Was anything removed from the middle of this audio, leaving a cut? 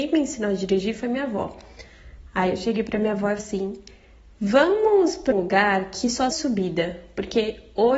yes; 3 cuts; at 3.4 s, 5.3 s, 6.3 s

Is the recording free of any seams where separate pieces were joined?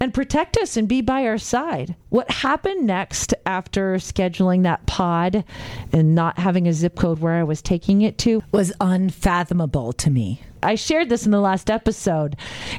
no; 1 cut; at 2.0 s

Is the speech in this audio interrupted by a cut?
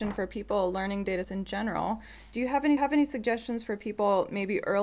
yes; 2 cuts; at 1.2 s, 2.8 s

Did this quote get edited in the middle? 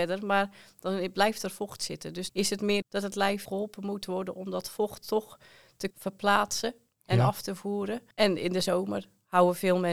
yes; 5 cuts; at 2.3 s, 2.8 s, 3.5 s, 5.9 s, 8.1 s

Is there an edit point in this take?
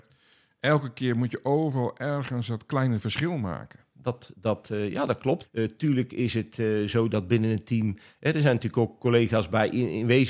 no; 0 cuts

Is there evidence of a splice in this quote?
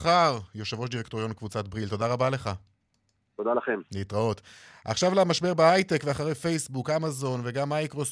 no; 0 cuts

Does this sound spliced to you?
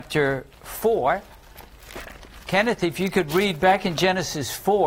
no; 0 cuts

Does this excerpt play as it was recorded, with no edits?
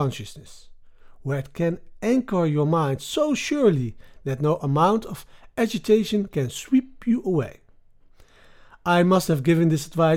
yes; 0 cuts

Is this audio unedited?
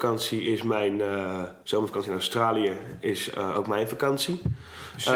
no; 1 cut; at 1.6 s

